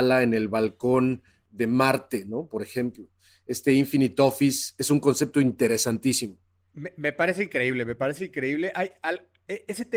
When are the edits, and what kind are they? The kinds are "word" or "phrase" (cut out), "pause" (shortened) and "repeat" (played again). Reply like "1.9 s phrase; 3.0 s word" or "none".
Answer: none